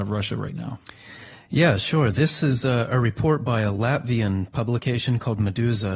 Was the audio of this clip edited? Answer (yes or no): no